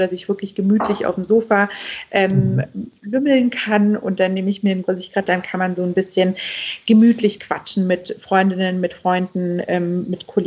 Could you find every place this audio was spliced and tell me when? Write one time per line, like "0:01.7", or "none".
0:04.8
0:05.3
0:07.4